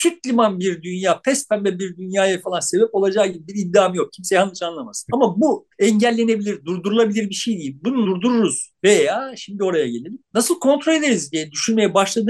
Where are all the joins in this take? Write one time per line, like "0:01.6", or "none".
0:02.4
0:05.7
0:08.0
0:08.8